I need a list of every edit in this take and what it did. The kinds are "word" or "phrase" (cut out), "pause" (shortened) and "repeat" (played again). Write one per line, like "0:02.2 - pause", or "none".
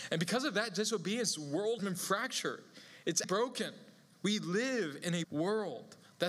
0:01.8 - word
0:03.2 - word
0:05.2 - word